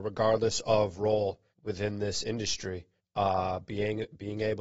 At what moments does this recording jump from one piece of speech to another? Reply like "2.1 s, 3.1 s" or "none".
1.5 s, 3.0 s